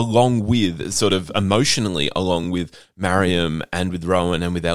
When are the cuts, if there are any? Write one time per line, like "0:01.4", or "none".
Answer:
none